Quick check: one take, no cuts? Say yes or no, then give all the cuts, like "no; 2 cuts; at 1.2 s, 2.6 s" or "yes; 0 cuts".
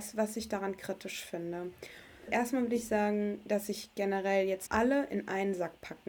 no; 2 cuts; at 2.3 s, 4.7 s